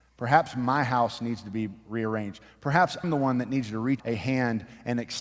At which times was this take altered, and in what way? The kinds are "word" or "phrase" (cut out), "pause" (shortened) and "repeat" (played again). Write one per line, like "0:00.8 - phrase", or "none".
0:03.0 - word
0:04.0 - word